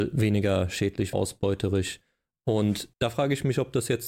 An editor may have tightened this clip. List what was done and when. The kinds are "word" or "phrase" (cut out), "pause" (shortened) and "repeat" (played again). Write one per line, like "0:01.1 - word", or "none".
0:01.1 - word
0:02.9 - pause

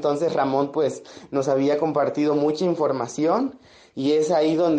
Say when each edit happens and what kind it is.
none

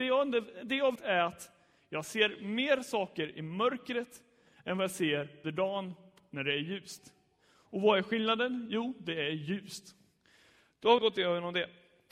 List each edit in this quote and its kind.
0:00.9 - word
0:05.4 - word
0:11.0 - word

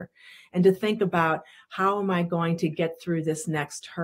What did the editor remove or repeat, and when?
none

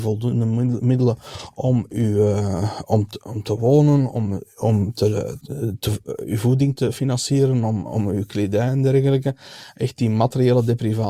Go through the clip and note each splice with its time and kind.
0:05.4 - word

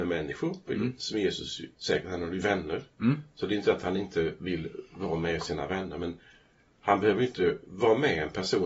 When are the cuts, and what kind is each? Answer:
none

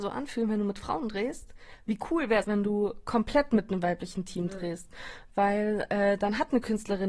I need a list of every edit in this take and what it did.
0:02.4 - word

